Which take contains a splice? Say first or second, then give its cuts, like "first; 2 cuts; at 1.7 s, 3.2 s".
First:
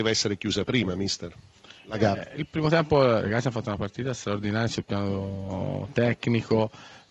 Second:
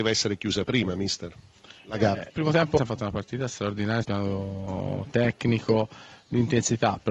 second; 3 cuts; at 2.3 s, 2.8 s, 4.0 s